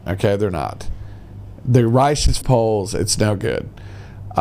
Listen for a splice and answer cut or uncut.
cut